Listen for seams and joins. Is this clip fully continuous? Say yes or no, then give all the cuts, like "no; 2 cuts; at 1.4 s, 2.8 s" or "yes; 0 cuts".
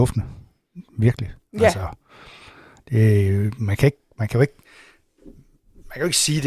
yes; 0 cuts